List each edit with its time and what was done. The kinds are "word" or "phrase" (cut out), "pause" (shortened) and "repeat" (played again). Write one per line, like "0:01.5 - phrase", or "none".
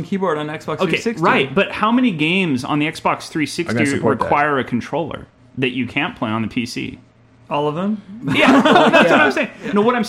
none